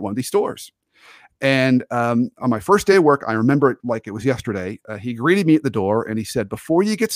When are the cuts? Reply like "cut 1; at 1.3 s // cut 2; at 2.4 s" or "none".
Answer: none